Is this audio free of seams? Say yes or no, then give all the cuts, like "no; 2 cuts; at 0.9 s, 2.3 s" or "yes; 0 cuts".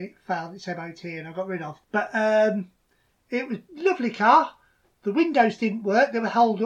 no; 1 cut; at 1.8 s